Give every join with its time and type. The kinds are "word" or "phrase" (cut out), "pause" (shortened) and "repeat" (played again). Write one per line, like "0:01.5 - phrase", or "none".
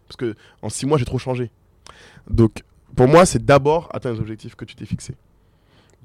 none